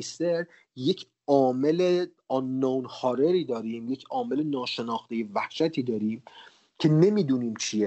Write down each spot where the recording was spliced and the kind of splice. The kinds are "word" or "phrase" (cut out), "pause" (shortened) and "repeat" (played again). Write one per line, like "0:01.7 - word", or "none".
none